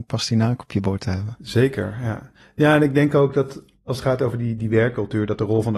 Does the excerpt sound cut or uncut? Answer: uncut